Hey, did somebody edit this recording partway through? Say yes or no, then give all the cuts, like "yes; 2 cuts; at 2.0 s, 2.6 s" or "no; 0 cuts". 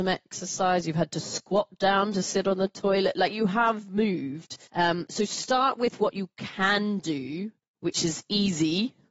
yes; 2 cuts; at 4.7 s, 7.6 s